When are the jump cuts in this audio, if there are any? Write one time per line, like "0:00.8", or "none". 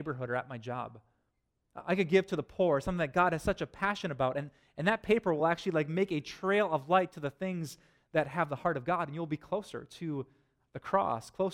none